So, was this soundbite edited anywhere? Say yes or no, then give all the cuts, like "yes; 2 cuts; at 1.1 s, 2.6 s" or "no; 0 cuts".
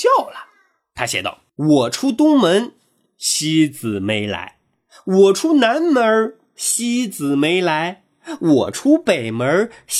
no; 0 cuts